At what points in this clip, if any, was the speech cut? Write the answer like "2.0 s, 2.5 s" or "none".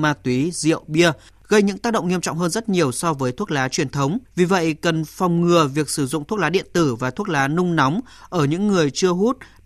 4.3 s

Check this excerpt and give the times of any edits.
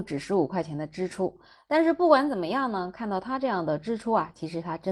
none

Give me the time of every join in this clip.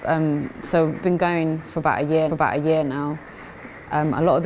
1.0 s, 2.3 s

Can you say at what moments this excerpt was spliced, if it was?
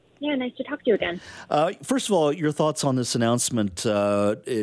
none

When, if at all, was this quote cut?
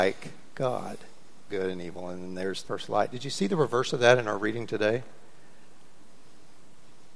1.5 s, 2.6 s

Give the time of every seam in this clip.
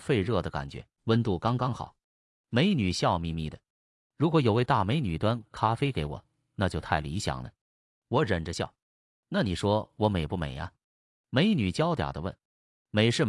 1.0 s

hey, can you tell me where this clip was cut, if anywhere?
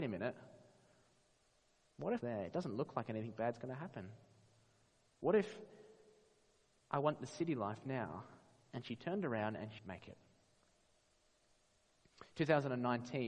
2.2 s, 9.8 s

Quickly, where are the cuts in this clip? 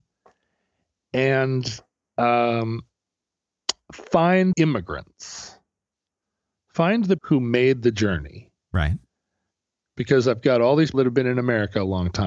4.5 s, 7.2 s, 10.9 s

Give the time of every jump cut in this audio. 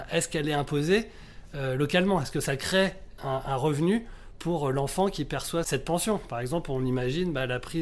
3.2 s, 5.6 s

